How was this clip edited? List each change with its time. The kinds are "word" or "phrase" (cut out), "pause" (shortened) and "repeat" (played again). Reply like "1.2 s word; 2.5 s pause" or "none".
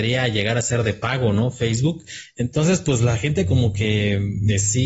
none